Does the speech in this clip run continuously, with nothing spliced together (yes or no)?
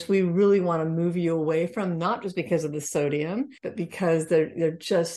no